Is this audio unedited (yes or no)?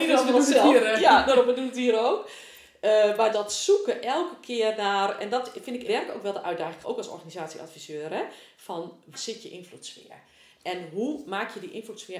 no